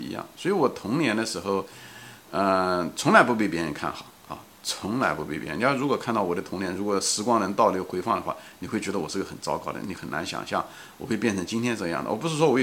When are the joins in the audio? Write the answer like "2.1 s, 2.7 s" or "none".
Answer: none